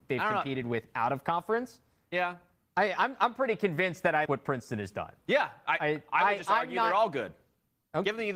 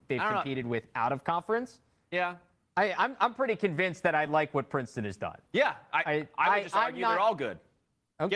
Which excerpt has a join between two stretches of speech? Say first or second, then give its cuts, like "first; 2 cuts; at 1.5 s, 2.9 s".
first; 1 cut; at 4.3 s